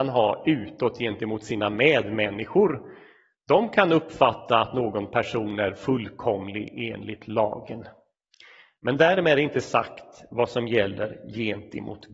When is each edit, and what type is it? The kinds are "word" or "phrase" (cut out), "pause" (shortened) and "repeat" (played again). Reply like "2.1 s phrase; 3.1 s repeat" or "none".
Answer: none